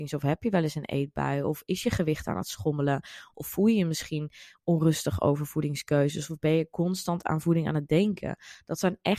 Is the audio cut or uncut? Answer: uncut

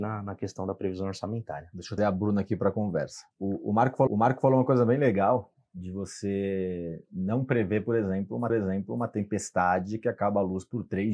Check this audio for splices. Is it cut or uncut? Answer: cut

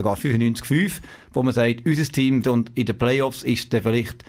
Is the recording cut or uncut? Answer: cut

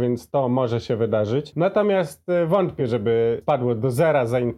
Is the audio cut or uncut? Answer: uncut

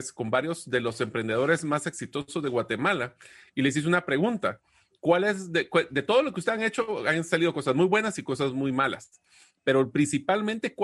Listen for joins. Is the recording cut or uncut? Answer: uncut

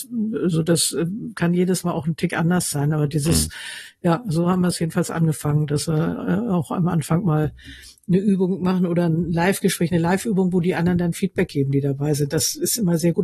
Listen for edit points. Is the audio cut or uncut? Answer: uncut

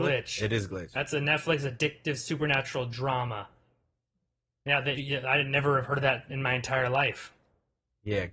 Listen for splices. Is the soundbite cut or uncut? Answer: cut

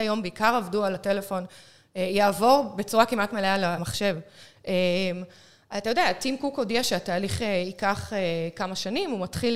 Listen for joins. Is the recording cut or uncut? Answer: uncut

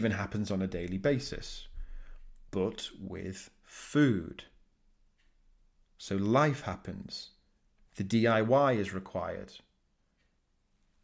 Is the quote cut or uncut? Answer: uncut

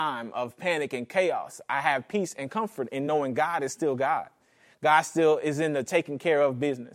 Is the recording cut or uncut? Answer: uncut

